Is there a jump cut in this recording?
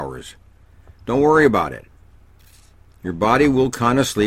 no; 0 cuts

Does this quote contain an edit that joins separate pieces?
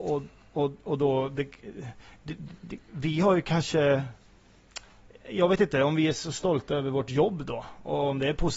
no; 0 cuts

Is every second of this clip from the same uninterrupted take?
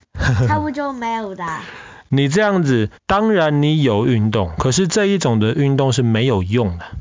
no; 1 cut; at 3.0 s

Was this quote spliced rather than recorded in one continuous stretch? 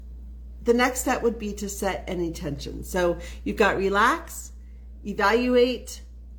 no; 0 cuts

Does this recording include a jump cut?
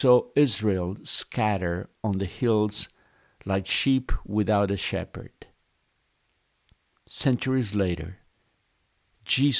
no; 0 cuts

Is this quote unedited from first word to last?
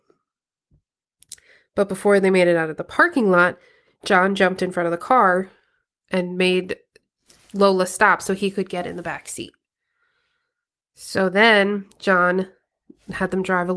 yes; 0 cuts

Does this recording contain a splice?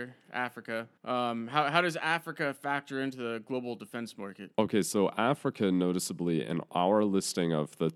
yes; 2 cuts; at 1.0 s, 4.5 s

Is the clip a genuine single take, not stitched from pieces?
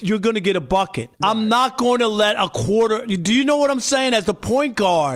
no; 1 cut; at 1.1 s

